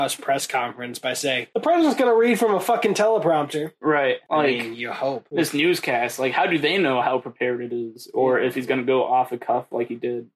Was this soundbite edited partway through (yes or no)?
no